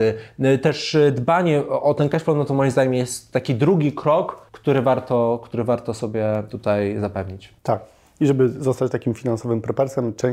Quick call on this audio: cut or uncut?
cut